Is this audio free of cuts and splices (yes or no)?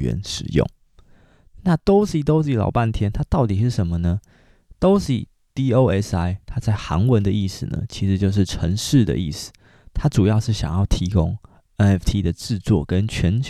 yes